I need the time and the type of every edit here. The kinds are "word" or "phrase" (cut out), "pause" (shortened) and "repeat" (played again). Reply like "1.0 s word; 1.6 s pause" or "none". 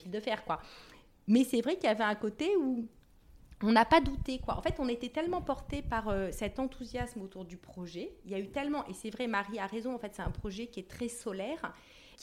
none